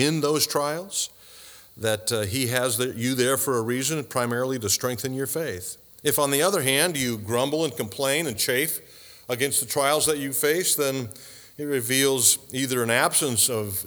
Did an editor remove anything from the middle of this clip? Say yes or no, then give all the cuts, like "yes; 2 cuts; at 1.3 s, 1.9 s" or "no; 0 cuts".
no; 0 cuts